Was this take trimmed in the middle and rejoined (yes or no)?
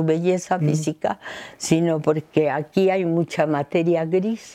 no